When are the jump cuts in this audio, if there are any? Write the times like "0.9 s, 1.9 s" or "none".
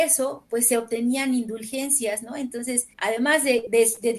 2.9 s